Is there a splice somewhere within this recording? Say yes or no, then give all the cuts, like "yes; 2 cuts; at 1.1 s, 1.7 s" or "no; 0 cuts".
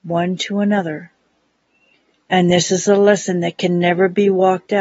no; 0 cuts